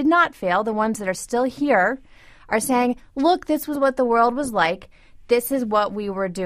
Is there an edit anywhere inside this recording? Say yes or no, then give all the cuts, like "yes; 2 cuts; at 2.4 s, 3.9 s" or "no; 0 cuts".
no; 0 cuts